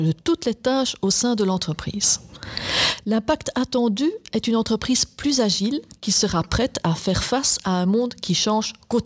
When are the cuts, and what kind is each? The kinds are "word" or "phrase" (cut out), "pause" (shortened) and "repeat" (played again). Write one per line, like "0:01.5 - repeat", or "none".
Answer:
none